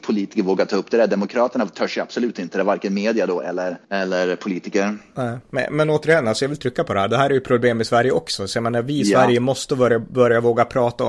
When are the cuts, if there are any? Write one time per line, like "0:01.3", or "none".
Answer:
0:03.8

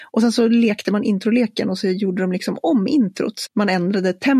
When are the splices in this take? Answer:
0:03.5

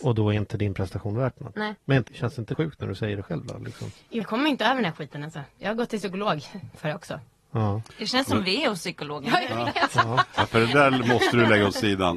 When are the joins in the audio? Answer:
0:02.1
0:02.5
0:04.2

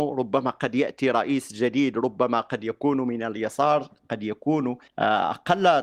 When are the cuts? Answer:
0:04.9

